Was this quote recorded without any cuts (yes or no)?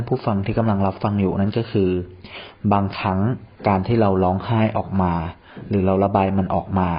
no